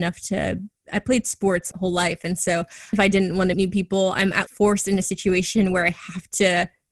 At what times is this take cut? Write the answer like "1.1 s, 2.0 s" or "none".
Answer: 1.7 s, 2.9 s, 3.5 s, 4.5 s